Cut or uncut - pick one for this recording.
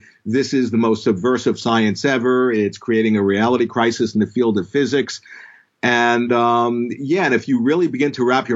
uncut